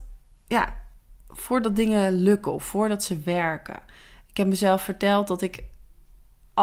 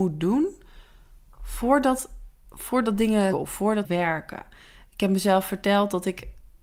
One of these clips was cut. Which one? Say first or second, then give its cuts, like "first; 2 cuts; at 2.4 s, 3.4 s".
second; 3 cuts; at 2.4 s, 3.3 s, 3.8 s